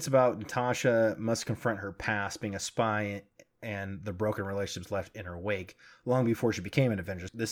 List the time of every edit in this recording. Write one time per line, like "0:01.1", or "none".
none